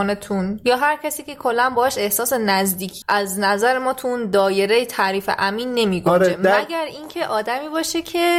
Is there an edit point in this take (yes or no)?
yes